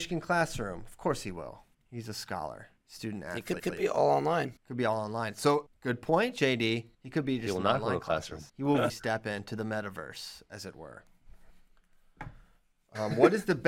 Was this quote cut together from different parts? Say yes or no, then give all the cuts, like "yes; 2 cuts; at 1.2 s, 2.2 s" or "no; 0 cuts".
yes; 8 cuts; at 1.7 s, 2.8 s, 3.6 s, 4.6 s, 5.7 s, 6.9 s, 8.5 s, 8.9 s